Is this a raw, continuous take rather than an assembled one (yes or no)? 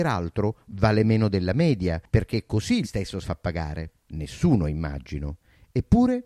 no